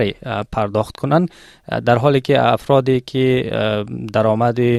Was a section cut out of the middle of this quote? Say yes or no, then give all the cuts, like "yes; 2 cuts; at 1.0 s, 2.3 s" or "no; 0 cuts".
no; 0 cuts